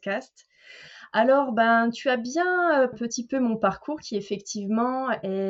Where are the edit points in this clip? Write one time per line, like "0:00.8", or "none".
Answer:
0:02.9